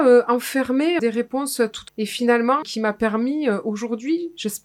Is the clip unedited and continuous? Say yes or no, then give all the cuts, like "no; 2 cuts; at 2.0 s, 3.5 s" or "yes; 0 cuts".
no; 3 cuts; at 1.0 s, 1.9 s, 2.6 s